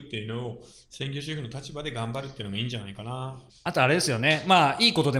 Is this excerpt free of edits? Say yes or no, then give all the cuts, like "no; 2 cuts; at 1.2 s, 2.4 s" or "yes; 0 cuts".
no; 1 cut; at 3.5 s